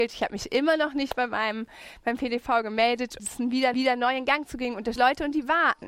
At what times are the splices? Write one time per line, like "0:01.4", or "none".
0:03.2
0:03.7
0:05.0